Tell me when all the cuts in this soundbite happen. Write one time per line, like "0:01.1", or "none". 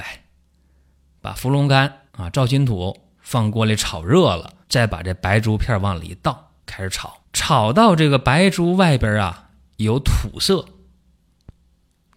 0:02.1
0:03.1
0:04.6
0:06.6
0:07.2